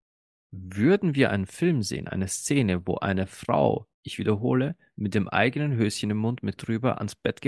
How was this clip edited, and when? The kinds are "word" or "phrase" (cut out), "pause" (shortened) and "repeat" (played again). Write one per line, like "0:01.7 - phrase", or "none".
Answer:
0:03.9 - pause
0:06.6 - word